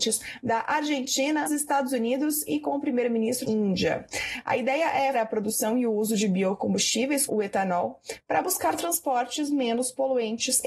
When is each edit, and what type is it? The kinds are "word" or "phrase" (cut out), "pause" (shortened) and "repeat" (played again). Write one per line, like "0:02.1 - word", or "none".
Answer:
0:01.5 - word
0:03.4 - word
0:05.1 - word
0:07.3 - word